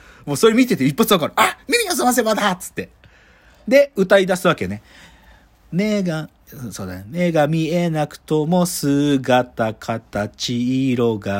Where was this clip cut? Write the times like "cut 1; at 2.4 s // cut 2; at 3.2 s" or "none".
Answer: none